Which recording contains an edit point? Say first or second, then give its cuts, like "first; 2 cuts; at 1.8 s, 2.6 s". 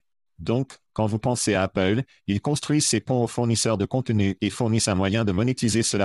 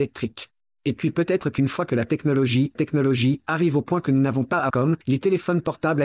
second; 3 cuts; at 2.7 s, 4.7 s, 5.0 s